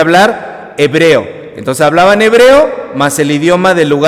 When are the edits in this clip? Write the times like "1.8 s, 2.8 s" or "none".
none